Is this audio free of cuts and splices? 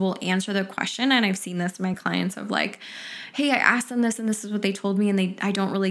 yes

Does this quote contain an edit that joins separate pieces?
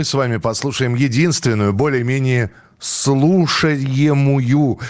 no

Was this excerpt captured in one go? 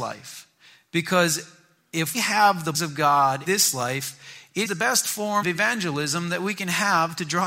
no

